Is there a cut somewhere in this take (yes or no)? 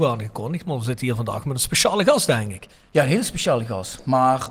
no